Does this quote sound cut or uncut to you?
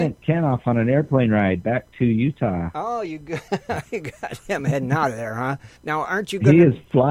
cut